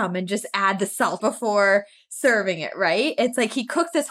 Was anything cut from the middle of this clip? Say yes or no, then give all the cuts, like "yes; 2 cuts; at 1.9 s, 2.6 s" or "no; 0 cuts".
yes; 1 cut; at 1.2 s